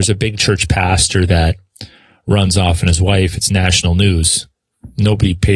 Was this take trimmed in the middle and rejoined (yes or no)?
no